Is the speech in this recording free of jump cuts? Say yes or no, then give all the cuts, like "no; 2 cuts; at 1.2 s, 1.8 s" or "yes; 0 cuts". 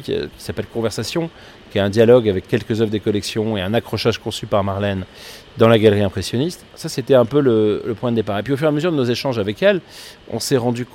no; 1 cut; at 6.7 s